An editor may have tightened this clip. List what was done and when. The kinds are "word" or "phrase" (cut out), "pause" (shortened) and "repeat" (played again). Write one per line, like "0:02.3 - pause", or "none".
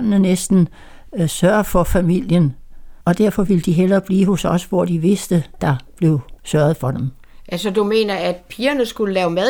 0:03.0 - pause
0:05.6 - word
0:06.4 - pause